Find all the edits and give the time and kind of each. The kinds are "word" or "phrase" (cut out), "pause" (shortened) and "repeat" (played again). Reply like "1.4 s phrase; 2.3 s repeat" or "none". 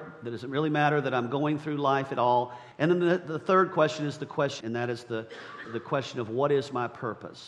2.7 s pause; 4.6 s phrase; 5.6 s word